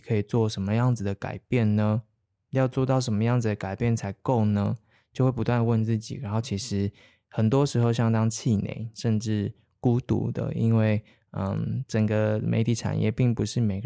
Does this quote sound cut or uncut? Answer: uncut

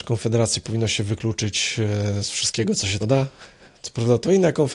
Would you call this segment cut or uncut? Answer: cut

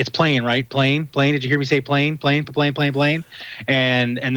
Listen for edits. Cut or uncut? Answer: uncut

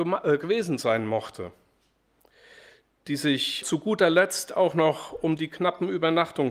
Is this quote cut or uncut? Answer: cut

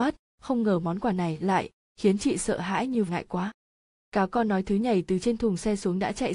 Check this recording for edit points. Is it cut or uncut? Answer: cut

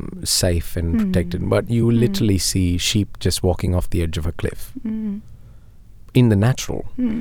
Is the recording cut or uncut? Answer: uncut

